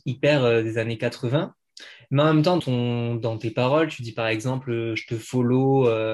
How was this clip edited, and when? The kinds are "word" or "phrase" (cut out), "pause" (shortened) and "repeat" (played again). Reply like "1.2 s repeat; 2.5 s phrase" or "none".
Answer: 2.6 s word

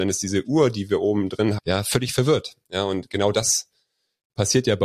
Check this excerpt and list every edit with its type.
1.6 s word

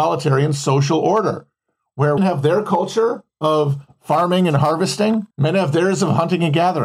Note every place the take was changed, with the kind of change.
2.2 s word; 5.3 s pause

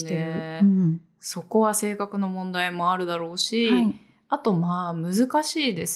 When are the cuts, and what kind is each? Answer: none

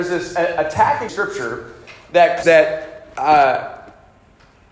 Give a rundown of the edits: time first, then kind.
1.1 s word; 2.4 s word

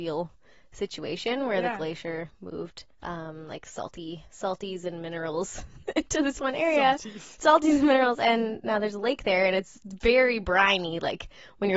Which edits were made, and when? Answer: 2.9 s pause; 4.2 s pause; 5.8 s pause

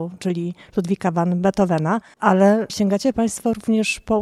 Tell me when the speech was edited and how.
2.1 s pause

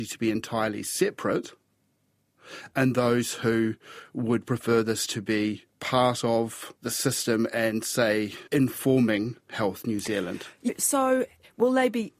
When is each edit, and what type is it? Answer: 5.7 s pause; 6.8 s pause; 8.5 s pause

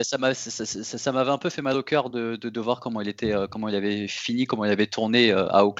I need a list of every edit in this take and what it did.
none

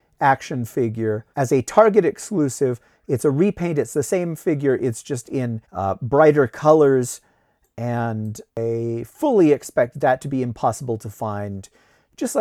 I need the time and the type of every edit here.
1.3 s pause; 5.6 s pause; 8.5 s pause

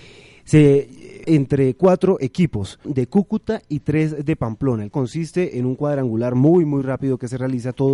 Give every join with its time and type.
1.2 s word; 2.8 s word; 4.9 s word

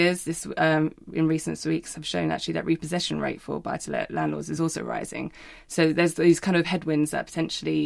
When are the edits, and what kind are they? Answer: none

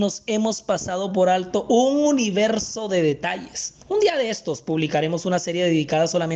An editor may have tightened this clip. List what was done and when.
3.8 s pause

